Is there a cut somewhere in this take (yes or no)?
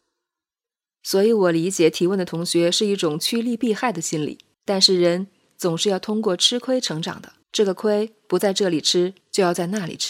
yes